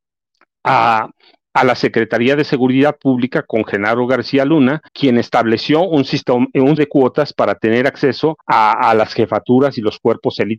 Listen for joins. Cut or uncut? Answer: cut